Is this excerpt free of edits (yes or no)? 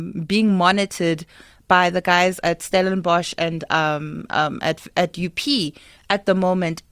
yes